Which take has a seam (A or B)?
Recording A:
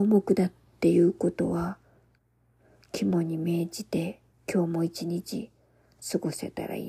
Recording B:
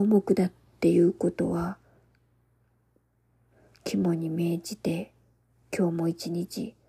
A